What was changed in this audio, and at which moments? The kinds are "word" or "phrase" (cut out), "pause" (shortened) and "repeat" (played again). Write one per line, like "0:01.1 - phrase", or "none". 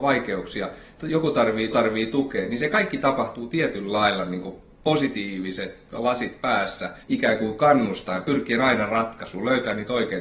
0:01.7 - repeat
0:07.0 - pause